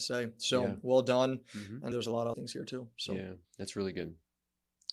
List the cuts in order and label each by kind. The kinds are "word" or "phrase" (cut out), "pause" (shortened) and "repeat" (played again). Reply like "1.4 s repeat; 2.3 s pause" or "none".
1.9 s word; 2.3 s phrase; 3.4 s pause